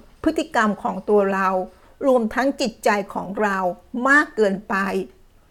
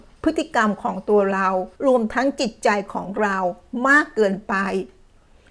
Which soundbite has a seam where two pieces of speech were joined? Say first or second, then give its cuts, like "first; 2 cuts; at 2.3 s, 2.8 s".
second; 1 cut; at 1.7 s